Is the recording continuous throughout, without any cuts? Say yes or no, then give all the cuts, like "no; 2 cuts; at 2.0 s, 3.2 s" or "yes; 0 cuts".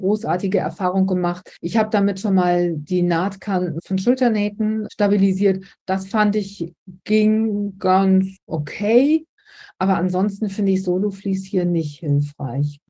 no; 2 cuts; at 1.6 s, 8.4 s